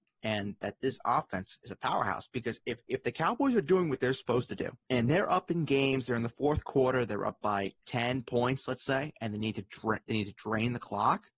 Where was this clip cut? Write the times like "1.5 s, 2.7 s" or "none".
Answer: 2.8 s, 4.8 s, 7.8 s